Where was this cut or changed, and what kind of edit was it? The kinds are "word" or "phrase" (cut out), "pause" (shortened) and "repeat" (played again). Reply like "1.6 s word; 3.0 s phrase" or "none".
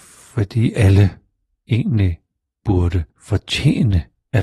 3.1 s pause